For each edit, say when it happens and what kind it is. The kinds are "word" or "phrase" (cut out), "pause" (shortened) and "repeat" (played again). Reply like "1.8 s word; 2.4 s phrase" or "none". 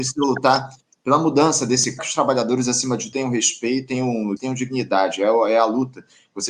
2.0 s phrase; 3.1 s word; 4.4 s word